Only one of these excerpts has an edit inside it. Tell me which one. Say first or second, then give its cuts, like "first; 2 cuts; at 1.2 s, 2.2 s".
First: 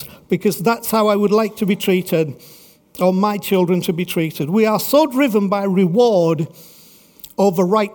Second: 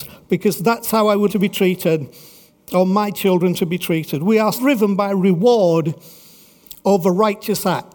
second; 2 cuts; at 1.3 s, 4.6 s